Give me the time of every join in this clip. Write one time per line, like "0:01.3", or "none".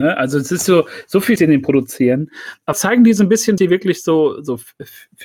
0:01.4
0:02.7
0:03.6